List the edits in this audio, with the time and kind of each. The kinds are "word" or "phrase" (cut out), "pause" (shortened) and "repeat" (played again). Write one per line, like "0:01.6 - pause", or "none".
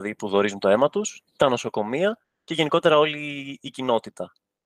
0:02.2 - pause